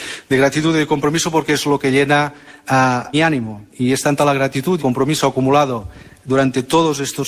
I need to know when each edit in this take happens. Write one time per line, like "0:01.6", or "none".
0:03.1
0:03.7
0:04.8